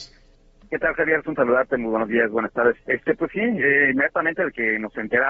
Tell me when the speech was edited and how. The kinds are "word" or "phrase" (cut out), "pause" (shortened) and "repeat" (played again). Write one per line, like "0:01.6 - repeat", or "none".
0:01.4 - word
0:02.8 - pause
0:03.3 - phrase